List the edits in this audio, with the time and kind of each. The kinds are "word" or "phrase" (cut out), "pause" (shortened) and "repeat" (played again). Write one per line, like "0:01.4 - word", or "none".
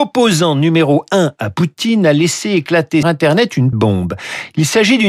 0:03.0 - word
0:03.7 - word